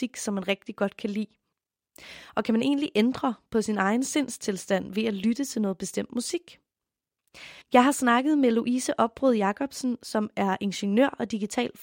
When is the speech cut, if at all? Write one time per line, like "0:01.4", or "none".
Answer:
0:07.6